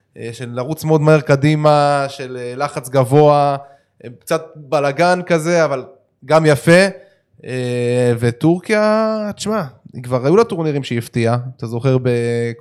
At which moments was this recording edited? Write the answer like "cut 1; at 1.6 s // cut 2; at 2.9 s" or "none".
none